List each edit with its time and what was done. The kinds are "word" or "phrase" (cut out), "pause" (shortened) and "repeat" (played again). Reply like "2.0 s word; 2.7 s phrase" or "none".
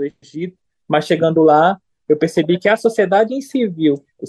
none